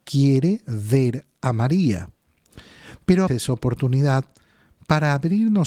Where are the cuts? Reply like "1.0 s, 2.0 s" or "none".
3.3 s